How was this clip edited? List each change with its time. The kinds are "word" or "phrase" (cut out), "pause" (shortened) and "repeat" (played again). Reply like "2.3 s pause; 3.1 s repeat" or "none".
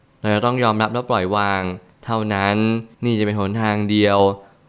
2.9 s pause